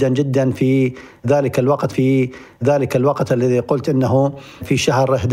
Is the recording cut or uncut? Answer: cut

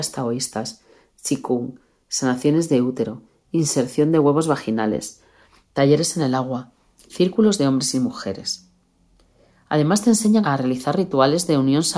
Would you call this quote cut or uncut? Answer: uncut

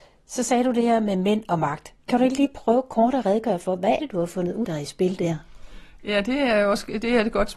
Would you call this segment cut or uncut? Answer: cut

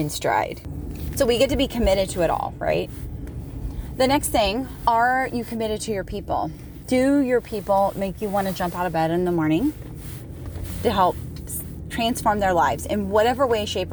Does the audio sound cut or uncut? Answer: uncut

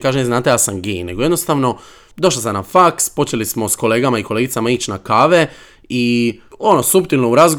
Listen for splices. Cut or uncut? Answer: uncut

